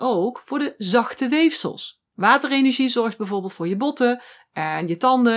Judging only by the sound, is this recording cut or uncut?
cut